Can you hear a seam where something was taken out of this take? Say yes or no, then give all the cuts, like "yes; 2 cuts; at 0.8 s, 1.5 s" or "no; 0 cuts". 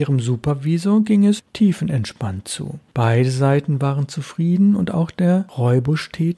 yes; 1 cut; at 2.9 s